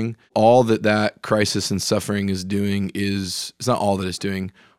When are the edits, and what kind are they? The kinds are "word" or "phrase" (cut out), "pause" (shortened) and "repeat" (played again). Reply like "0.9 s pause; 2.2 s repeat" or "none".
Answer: none